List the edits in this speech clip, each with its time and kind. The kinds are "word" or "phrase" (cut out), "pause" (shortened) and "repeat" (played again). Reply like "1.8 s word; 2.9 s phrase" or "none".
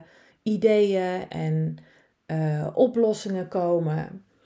1.3 s word